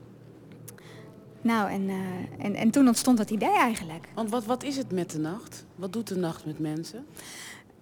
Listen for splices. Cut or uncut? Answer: uncut